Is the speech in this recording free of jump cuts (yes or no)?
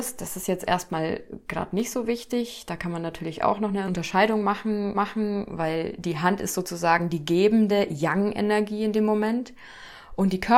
no